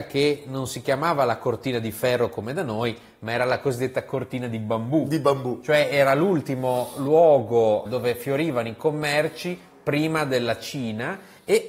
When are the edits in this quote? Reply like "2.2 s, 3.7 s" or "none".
7.9 s